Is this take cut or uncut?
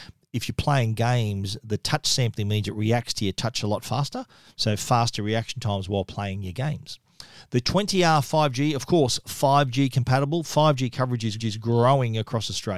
cut